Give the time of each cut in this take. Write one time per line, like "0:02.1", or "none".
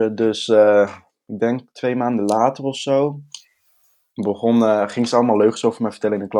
none